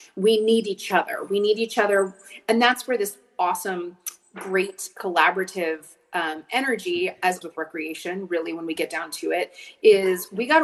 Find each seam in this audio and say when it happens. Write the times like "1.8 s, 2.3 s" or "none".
7.4 s